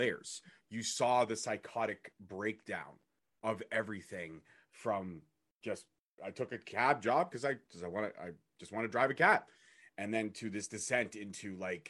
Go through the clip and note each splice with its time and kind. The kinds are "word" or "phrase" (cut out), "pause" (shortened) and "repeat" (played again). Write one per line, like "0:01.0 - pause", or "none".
0:06.2 - word